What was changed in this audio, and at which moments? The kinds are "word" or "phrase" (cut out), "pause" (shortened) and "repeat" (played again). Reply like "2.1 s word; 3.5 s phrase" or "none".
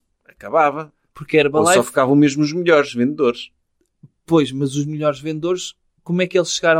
none